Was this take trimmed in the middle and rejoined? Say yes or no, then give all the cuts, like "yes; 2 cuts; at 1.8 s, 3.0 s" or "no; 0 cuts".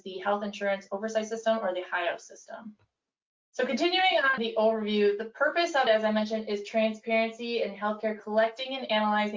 yes; 4 cuts; at 3.3 s, 4.4 s, 5.9 s, 8.2 s